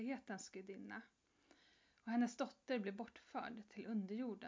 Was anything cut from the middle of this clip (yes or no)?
no